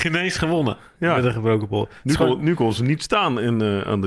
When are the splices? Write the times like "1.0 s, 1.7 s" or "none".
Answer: none